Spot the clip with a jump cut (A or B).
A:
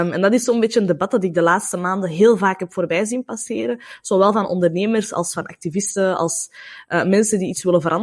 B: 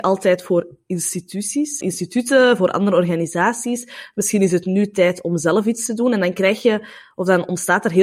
B